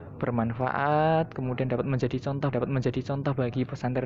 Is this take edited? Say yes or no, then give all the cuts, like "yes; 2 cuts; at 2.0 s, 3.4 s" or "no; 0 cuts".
yes; 1 cut; at 2.5 s